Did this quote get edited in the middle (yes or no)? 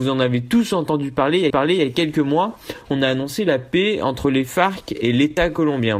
yes